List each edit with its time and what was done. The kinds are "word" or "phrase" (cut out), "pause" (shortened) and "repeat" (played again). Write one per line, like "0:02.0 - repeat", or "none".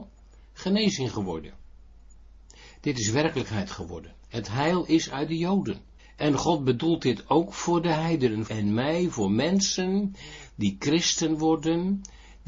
0:06.0 - pause
0:08.5 - phrase